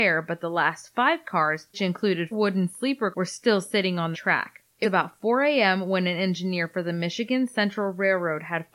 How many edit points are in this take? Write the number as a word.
five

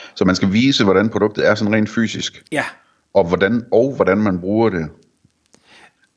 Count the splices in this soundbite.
one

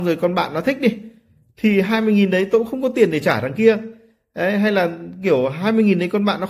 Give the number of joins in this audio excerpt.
zero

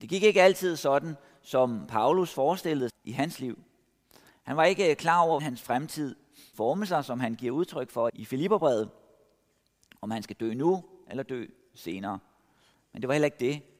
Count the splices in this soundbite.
four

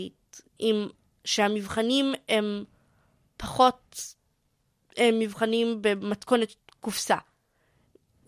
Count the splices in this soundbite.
zero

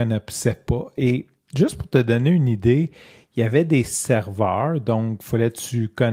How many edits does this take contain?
zero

